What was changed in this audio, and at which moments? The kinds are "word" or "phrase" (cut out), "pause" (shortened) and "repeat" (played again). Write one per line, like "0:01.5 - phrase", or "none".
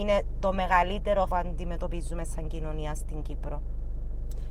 0:01.3 - word